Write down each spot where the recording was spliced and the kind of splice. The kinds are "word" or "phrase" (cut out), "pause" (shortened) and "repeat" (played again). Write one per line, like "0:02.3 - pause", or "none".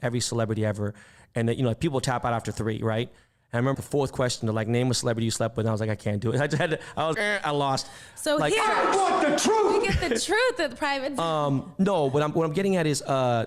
0:03.7 - word
0:07.1 - word